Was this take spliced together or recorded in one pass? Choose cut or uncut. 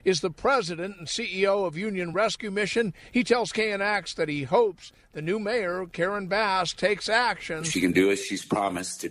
uncut